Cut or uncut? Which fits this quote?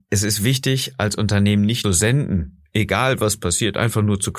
cut